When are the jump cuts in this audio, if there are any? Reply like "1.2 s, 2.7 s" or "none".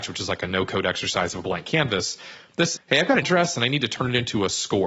2.7 s, 3.2 s